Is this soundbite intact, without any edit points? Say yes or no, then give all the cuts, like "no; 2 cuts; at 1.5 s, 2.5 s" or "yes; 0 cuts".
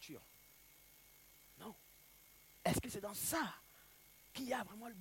yes; 0 cuts